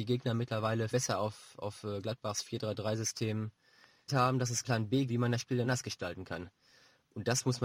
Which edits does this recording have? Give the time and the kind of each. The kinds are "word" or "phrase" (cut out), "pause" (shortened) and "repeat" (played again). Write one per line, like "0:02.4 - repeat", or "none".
0:00.9 - word
0:04.1 - word
0:04.6 - word
0:05.1 - word
0:05.6 - word